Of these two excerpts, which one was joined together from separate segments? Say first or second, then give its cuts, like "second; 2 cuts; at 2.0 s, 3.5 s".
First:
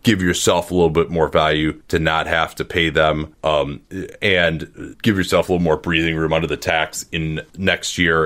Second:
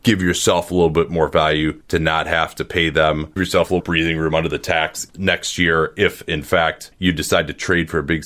second; 3 cuts; at 3.4 s, 3.8 s, 5.1 s